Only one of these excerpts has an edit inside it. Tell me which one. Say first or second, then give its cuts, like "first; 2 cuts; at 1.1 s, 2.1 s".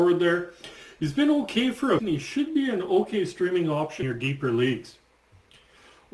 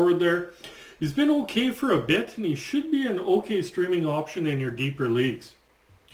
first; 2 cuts; at 2.0 s, 4.0 s